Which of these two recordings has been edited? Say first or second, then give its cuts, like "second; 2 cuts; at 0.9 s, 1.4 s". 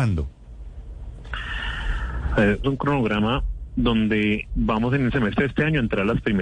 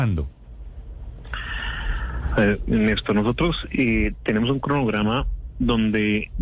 first; 2 cuts; at 2.6 s, 5.1 s